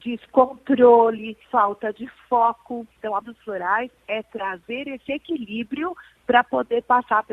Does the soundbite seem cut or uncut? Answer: cut